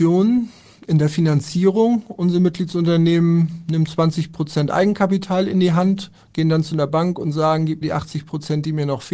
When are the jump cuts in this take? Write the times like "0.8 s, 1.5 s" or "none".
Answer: 7.8 s